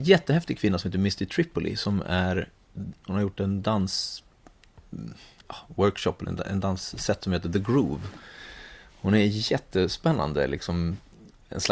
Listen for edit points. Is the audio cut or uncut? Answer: uncut